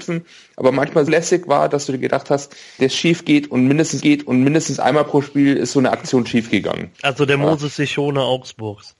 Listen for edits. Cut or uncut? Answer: cut